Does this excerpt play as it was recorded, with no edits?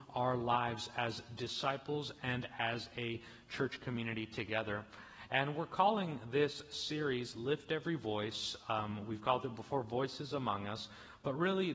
yes; 0 cuts

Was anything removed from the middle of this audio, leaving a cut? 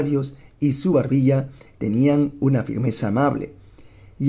no; 0 cuts

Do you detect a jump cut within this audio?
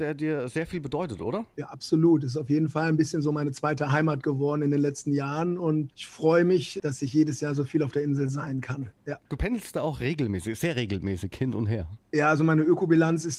no; 0 cuts

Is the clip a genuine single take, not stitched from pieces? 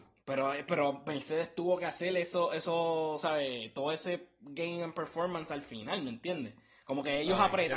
yes; 0 cuts

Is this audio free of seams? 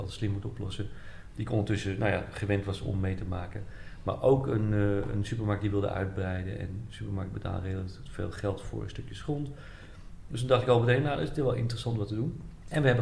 yes; 0 cuts

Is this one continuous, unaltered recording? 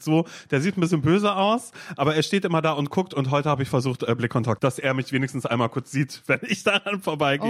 no; 1 cut; at 4.6 s

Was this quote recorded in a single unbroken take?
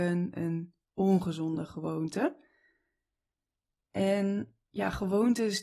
yes; 0 cuts

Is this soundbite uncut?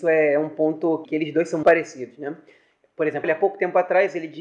no; 3 cuts; at 1.0 s, 1.6 s, 3.2 s

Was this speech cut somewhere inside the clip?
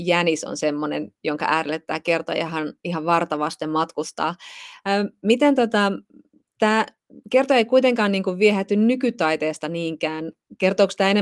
no; 0 cuts

